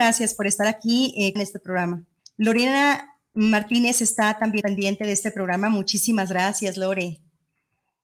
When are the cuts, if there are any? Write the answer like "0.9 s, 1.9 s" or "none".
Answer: 1.4 s, 2.2 s, 4.6 s